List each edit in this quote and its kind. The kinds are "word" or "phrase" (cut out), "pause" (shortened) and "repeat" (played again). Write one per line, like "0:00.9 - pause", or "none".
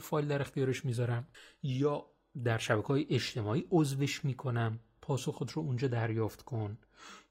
0:01.3 - pause